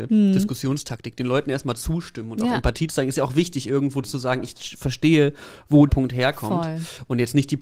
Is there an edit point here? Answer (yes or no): yes